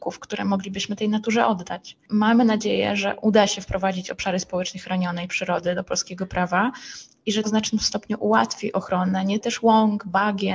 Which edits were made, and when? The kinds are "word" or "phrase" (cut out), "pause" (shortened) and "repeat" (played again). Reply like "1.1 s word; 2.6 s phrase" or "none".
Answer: 7.4 s word; 9.4 s phrase